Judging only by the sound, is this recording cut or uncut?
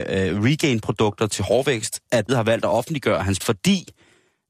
cut